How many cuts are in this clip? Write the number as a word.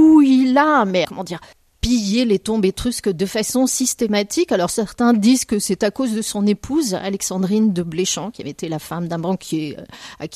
two